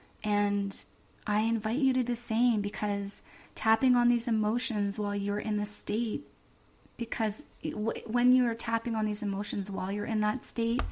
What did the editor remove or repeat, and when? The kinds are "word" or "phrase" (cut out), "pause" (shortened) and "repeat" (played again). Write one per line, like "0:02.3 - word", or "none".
0:02.0 - word